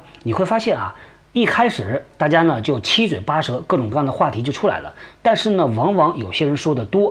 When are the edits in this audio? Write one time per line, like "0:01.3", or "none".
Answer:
none

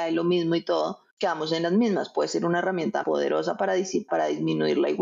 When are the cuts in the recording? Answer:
0:01.1
0:03.0
0:04.1

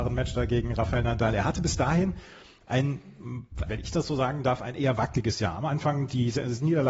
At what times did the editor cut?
0:03.7

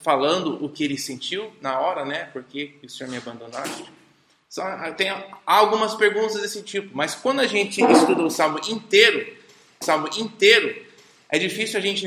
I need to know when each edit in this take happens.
0:09.8

